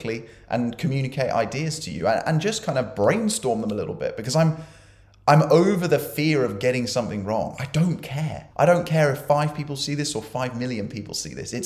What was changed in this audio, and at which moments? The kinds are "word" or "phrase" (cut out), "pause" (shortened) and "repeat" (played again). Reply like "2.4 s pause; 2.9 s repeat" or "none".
8.5 s pause